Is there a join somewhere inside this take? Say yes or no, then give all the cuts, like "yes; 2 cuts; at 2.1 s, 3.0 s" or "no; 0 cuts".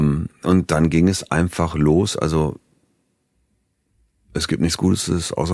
no; 0 cuts